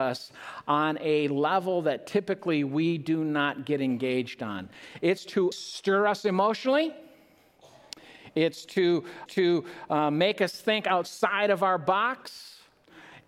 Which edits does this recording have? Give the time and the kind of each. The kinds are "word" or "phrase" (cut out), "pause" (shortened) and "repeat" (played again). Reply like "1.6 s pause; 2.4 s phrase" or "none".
5.5 s phrase; 9.3 s repeat